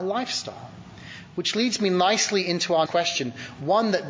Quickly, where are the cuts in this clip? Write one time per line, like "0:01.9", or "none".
0:02.9

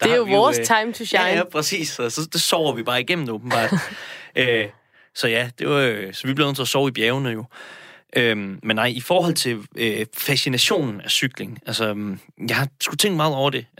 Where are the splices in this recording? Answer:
none

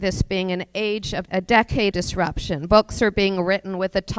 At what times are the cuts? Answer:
0:01.3
0:01.9

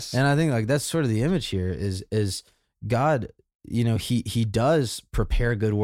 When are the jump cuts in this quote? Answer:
none

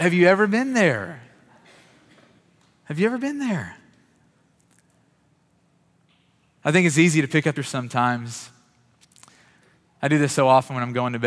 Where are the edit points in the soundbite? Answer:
0:07.6

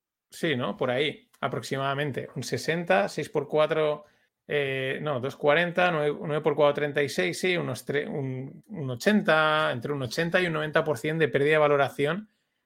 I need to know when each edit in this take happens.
0:04.3
0:08.6

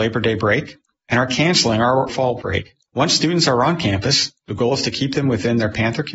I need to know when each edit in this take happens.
none

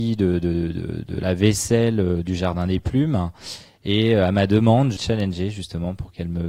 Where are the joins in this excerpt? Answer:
0:05.0

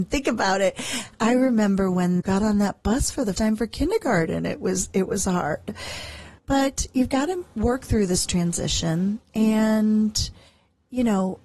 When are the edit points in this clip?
0:02.2
0:03.4
0:06.4

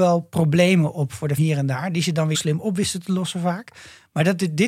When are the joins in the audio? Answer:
0:01.4
0:02.3

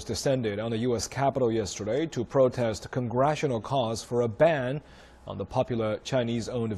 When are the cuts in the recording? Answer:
none

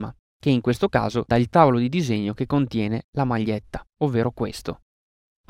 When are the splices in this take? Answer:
0:01.3
0:03.9

